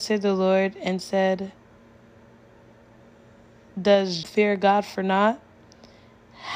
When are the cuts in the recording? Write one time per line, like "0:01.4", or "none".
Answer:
0:04.2